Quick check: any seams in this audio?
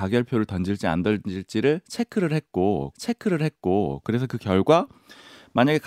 yes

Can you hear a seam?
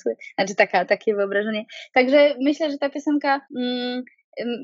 yes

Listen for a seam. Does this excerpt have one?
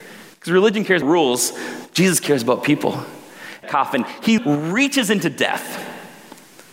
yes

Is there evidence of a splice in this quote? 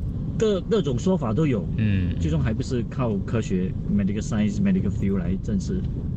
no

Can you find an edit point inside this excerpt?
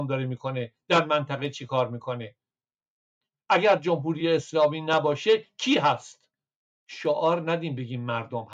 no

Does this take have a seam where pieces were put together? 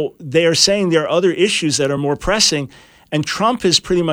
no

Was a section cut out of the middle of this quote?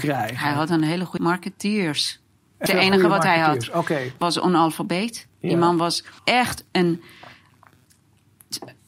yes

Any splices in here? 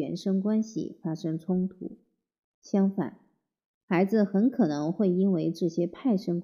no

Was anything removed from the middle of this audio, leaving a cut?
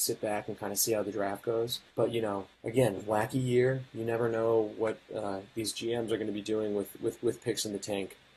yes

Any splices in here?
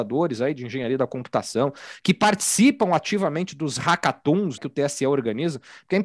yes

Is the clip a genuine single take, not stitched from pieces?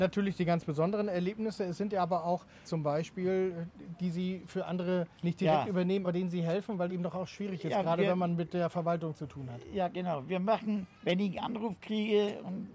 no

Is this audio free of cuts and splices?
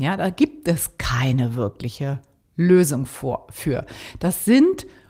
yes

